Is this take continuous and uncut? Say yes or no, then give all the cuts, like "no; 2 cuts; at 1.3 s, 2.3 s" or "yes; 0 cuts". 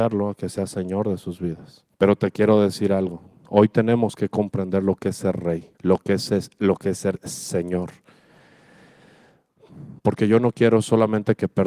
no; 3 cuts; at 1.9 s, 5.7 s, 10.0 s